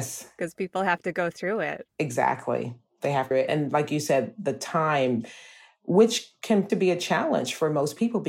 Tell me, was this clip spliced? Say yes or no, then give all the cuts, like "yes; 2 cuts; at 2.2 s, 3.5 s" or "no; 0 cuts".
yes; 3 cuts; at 1.9 s, 3.3 s, 6.7 s